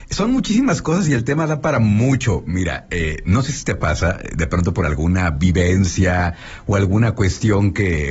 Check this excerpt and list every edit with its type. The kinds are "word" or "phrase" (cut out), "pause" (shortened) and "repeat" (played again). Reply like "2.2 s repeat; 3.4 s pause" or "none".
none